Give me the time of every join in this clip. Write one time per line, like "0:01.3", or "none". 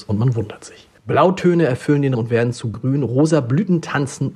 0:01.0
0:02.1
0:02.7